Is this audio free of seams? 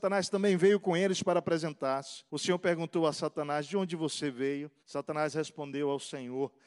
no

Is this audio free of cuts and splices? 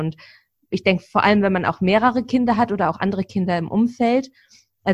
yes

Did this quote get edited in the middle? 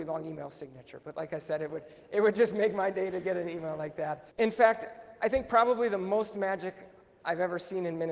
yes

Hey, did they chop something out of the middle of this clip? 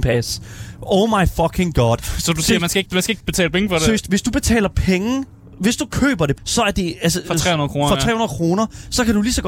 yes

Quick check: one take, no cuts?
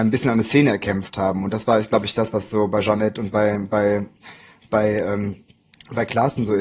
yes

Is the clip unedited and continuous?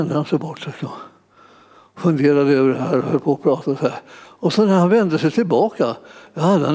yes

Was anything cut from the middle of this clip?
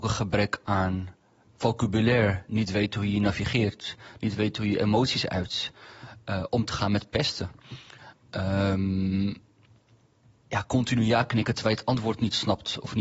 no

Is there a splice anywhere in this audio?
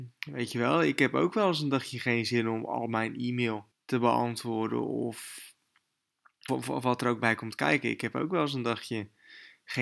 yes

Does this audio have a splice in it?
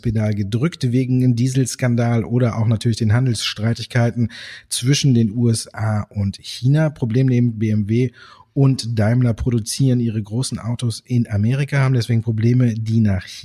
no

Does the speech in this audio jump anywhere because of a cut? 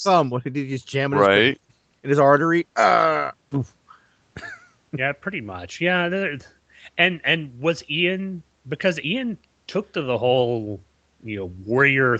no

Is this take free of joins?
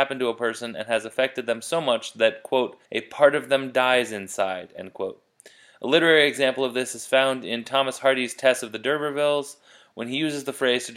no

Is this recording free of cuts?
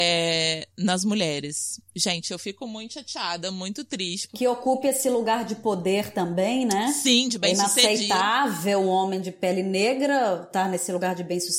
yes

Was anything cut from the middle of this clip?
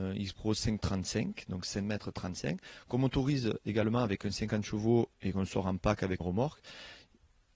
yes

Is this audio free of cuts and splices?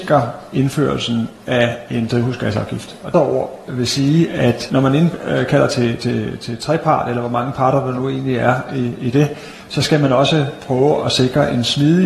no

